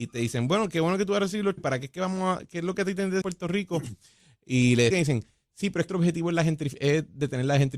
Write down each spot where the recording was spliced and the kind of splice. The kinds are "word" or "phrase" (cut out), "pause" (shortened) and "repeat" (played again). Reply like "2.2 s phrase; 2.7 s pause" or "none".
1.6 s word; 3.2 s word; 4.9 s word; 5.9 s word